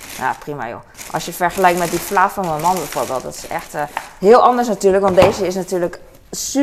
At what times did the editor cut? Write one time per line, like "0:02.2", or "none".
none